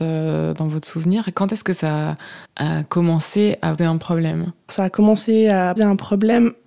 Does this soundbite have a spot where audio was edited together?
yes; 4 cuts; at 2.5 s, 3.8 s, 4.7 s, 5.8 s

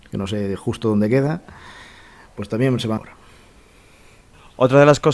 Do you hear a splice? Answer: yes; 1 cut; at 3.0 s

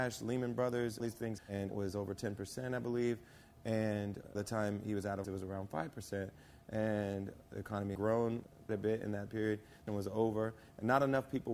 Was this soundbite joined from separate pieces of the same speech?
yes; 9 cuts; at 1.0 s, 1.4 s, 1.7 s, 4.3 s, 5.2 s, 7.9 s, 8.7 s, 9.3 s, 9.9 s

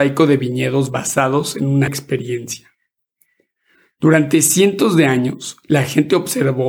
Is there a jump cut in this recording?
yes; 1 cut; at 1.9 s

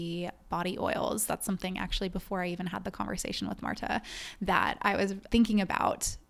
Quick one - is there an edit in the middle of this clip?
yes; 1 cut; at 5.3 s

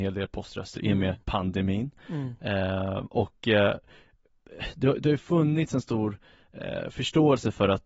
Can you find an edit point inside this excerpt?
yes; 1 cut; at 1.2 s

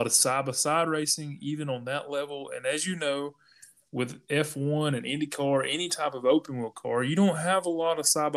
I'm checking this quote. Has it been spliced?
no; 0 cuts

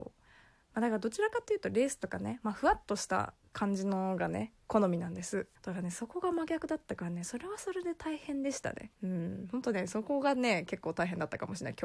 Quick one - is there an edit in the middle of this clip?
yes; 2 cuts; at 5.5 s, 9.0 s

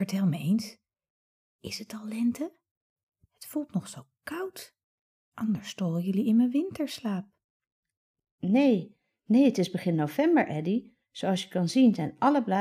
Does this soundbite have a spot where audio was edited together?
no; 0 cuts

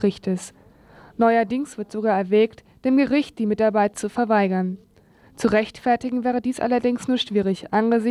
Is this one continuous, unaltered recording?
yes; 0 cuts

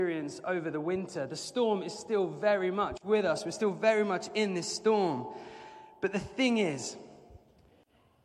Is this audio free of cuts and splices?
yes; 0 cuts

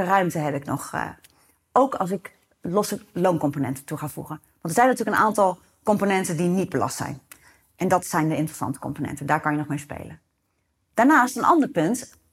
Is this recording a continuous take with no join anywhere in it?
yes; 0 cuts

